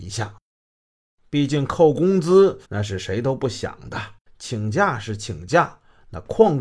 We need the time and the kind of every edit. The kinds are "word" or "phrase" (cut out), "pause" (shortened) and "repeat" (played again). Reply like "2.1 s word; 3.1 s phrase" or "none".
2.6 s pause; 4.2 s pause